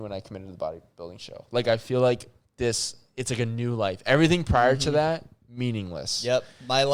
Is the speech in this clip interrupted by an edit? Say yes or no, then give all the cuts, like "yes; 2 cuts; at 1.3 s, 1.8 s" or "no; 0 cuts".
no; 0 cuts